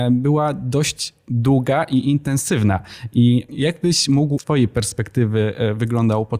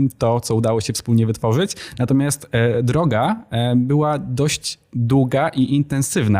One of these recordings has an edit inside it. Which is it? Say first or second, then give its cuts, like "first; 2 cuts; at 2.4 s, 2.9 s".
first; 1 cut; at 4.4 s